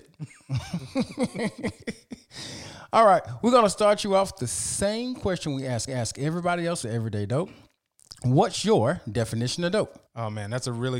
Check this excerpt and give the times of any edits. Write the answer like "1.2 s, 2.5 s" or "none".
5.9 s, 6.8 s, 10.1 s

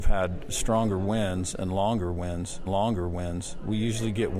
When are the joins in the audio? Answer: 2.7 s

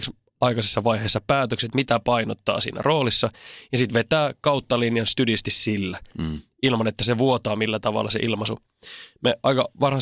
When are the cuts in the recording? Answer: none

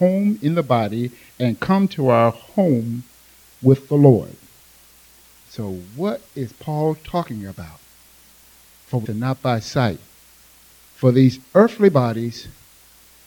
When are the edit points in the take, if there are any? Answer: 9.0 s

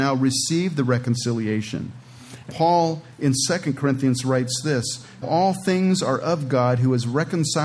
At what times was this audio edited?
2.5 s, 5.2 s

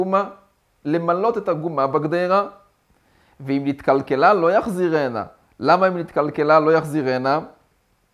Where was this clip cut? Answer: none

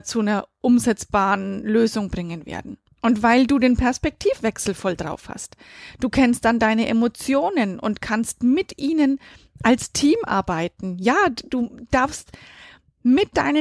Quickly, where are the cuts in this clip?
2.9 s

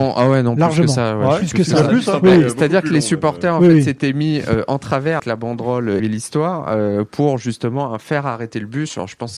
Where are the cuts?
5.2 s, 6.0 s

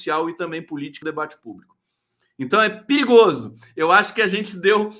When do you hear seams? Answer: 1.0 s

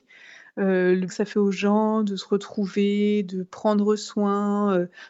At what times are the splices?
1.1 s

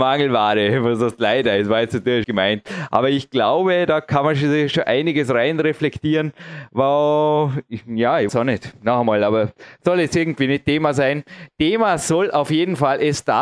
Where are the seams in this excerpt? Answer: 2.2 s, 8.3 s

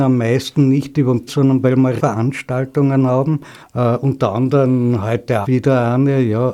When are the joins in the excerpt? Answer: 1.3 s, 2.0 s, 3.6 s, 5.4 s

